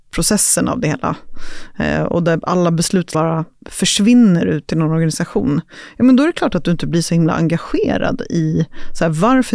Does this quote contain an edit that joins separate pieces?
yes; 1 cut; at 3.1 s

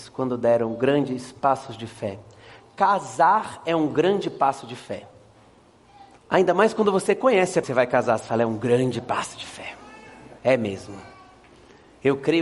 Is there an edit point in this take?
yes; 3 cuts; at 6.2 s, 7.6 s, 10.4 s

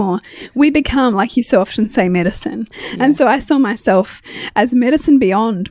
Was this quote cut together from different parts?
no; 0 cuts

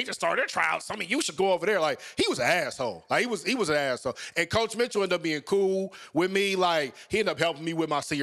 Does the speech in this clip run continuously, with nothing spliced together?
no; 1 cut; at 1.4 s

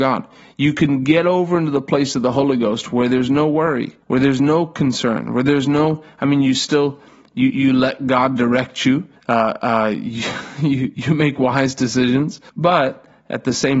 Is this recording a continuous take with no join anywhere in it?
no; 4 cuts; at 4.0 s, 7.5 s, 9.2 s, 12.5 s

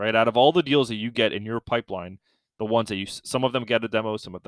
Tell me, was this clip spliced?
no; 0 cuts

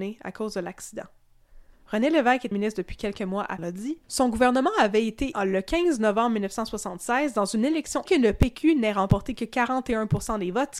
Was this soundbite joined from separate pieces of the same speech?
yes; 6 cuts; at 1.7 s, 2.5 s, 3.6 s, 4.0 s, 5.3 s, 8.1 s

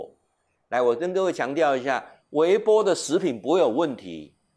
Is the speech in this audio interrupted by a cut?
no; 0 cuts

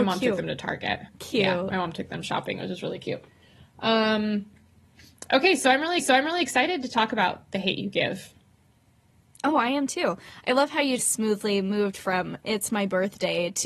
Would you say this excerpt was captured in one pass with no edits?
no; 3 cuts; at 1.1 s, 6.0 s, 11.0 s

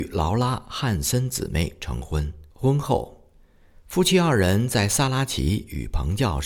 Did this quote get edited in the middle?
yes; 1 cut; at 2.5 s

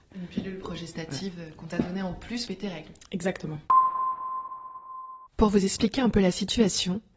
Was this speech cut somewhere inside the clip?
yes; 2 cuts; at 2.5 s, 5.3 s

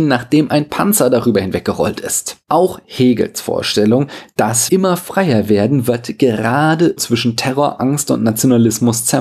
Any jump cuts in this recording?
yes; 2 cuts; at 4.7 s, 7.0 s

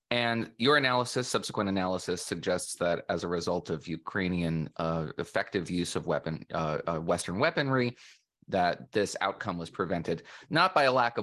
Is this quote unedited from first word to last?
yes; 0 cuts

